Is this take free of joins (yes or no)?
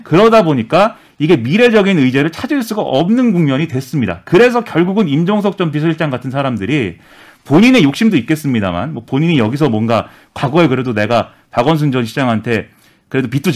yes